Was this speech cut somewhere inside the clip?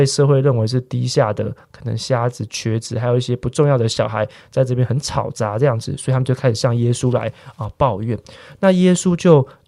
no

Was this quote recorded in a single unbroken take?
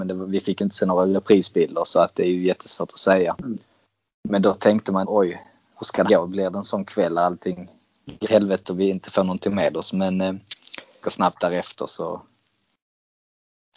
no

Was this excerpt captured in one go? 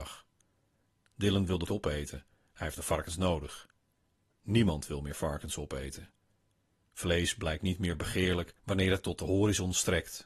no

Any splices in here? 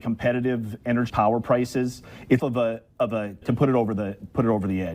yes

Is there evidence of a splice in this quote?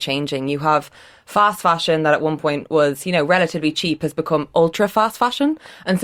no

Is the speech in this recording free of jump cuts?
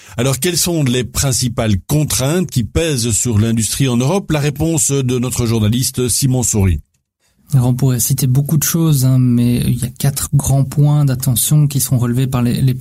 yes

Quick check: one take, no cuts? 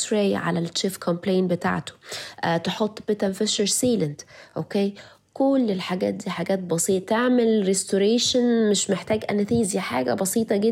yes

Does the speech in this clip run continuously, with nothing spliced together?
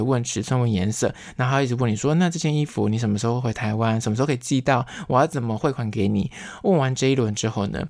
yes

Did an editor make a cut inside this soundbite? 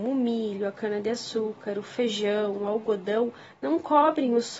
no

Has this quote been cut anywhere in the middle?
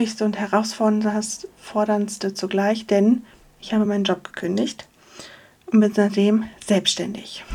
no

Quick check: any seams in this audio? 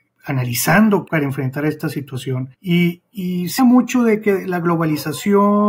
yes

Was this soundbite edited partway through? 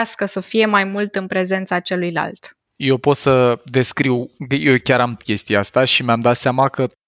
yes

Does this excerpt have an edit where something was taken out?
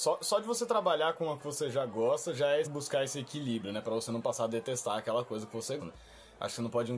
yes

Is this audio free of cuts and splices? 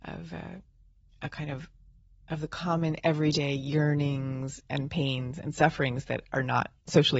no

